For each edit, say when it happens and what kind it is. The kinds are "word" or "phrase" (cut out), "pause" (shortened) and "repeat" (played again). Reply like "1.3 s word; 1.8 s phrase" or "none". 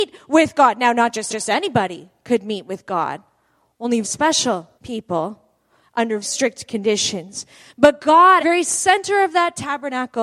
1.3 s repeat; 4.0 s word; 4.8 s pause; 6.2 s word; 8.4 s phrase

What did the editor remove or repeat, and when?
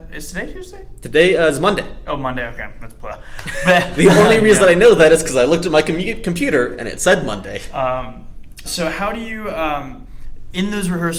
8.6 s word

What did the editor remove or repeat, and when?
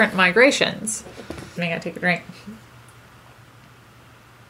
1.6 s word

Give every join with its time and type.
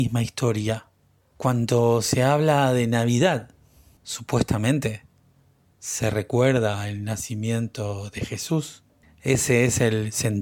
none

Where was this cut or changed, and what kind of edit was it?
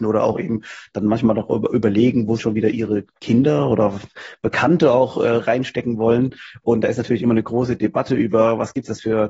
2.4 s word; 3.1 s pause

